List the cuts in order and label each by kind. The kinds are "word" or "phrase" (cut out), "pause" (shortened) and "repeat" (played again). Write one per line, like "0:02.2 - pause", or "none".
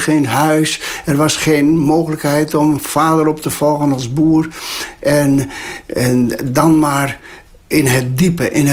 none